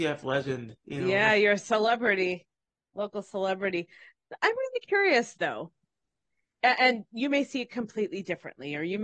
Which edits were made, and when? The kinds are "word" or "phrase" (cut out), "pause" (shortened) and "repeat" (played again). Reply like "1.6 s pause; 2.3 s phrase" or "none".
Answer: none